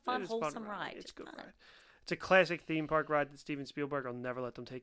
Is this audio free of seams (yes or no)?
yes